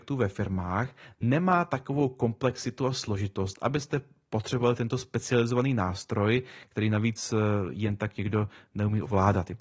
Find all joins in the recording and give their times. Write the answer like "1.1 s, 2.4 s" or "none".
none